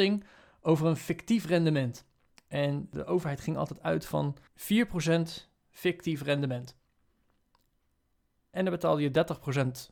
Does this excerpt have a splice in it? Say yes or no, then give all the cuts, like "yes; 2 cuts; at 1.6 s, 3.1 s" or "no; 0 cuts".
yes; 1 cut; at 4.5 s